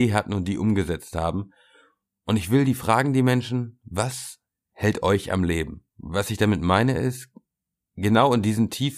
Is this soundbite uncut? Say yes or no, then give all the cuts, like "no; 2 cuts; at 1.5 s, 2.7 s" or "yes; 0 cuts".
no; 1 cut; at 5.9 s